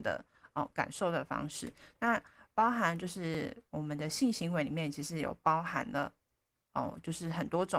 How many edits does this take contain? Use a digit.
1